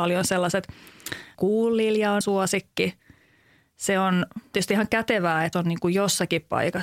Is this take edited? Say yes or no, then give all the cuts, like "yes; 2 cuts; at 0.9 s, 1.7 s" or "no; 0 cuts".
yes; 4 cuts; at 1.3 s, 2.2 s, 4.5 s, 5.5 s